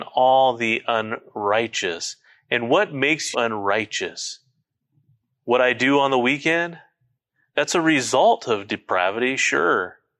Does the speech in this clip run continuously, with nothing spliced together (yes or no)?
no